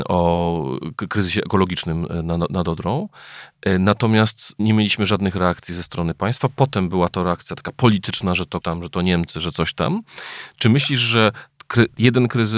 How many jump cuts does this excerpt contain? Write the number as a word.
two